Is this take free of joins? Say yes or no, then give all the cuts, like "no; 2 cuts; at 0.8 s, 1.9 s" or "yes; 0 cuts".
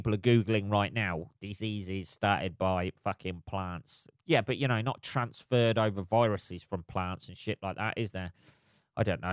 yes; 0 cuts